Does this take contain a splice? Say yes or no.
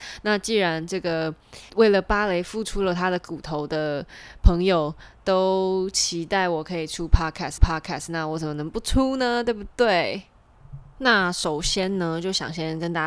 yes